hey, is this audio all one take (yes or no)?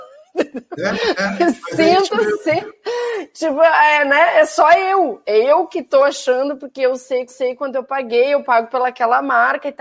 no